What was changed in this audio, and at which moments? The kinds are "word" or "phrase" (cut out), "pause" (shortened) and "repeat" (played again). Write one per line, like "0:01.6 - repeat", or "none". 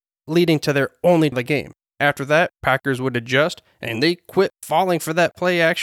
0:01.3 - word
0:02.6 - pause